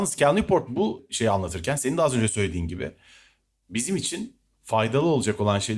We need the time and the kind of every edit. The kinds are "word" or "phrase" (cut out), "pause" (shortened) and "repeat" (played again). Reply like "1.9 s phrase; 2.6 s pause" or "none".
none